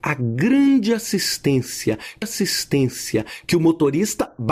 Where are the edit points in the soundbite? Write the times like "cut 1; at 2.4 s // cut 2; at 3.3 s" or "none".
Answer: cut 1; at 2.2 s

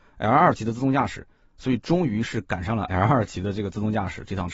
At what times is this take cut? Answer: none

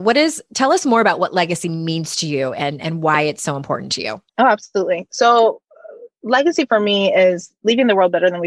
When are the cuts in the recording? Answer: cut 1; at 4.3 s

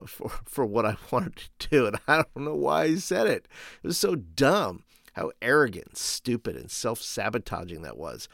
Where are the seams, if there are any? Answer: none

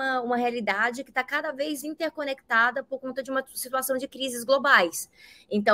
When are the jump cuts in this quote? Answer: cut 1; at 1.8 s

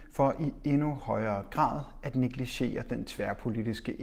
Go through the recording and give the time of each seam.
none

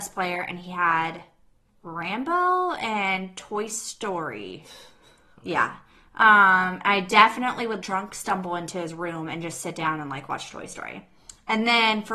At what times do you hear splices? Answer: cut 1; at 7.8 s

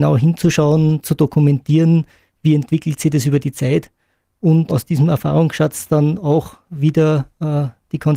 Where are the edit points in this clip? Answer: cut 1; at 1.0 s // cut 2; at 4.7 s

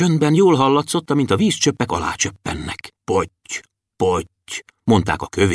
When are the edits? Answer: cut 1; at 3.0 s

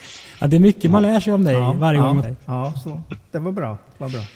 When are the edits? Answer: cut 1; at 2.2 s

